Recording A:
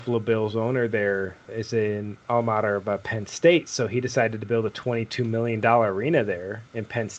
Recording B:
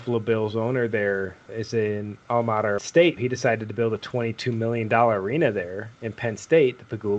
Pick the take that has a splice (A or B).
B